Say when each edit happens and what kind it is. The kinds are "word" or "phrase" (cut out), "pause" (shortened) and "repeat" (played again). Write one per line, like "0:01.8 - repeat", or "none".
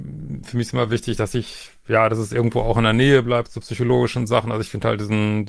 none